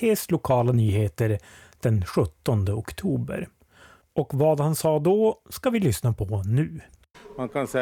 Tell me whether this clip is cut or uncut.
uncut